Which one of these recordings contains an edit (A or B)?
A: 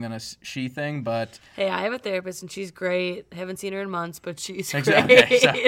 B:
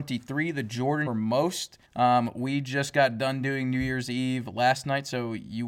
B